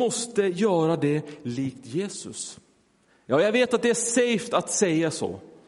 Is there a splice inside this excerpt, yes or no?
no